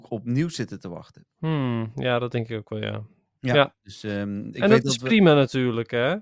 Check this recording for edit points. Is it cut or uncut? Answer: uncut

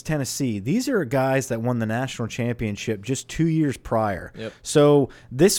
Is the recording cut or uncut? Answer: uncut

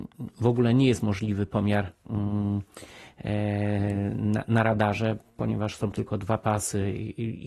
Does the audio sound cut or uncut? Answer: uncut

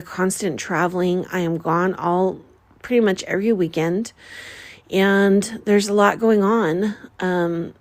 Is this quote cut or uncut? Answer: uncut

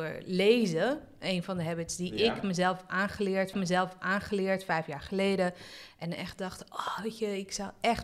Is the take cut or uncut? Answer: cut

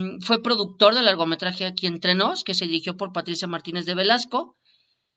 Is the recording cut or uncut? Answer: uncut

